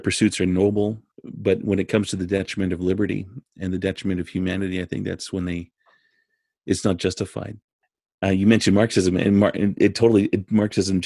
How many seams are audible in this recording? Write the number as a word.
one